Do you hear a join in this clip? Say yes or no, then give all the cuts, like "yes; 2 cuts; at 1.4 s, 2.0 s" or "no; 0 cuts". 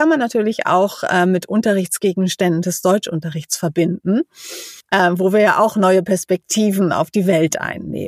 no; 0 cuts